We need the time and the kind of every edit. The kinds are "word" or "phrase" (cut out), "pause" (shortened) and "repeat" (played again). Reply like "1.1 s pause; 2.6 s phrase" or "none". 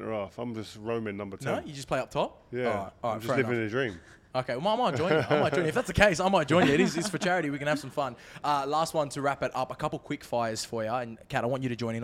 none